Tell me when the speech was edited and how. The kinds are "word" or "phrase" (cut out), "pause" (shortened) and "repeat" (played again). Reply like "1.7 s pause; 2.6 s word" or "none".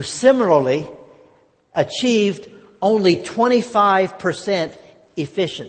none